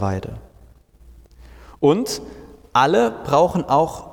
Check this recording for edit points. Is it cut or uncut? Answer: uncut